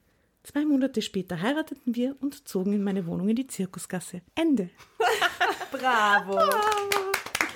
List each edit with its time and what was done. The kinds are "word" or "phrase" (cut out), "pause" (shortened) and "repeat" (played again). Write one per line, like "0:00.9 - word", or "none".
0:04.3 - pause